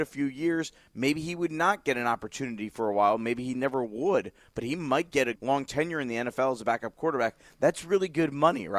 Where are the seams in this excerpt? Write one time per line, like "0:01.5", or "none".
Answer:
0:05.3